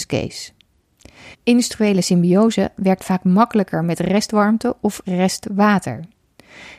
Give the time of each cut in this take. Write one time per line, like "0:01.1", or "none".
0:01.3